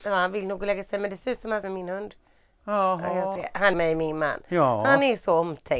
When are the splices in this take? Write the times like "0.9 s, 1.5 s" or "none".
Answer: 1.6 s, 3.4 s, 3.7 s